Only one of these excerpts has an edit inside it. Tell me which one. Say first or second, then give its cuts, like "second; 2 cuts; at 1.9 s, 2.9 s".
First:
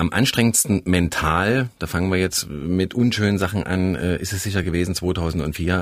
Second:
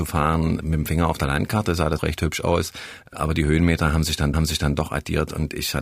second; 2 cuts; at 2.0 s, 4.3 s